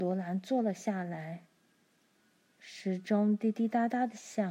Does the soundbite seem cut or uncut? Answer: uncut